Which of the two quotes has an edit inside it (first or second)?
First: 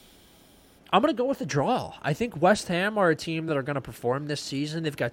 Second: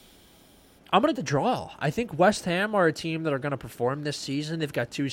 second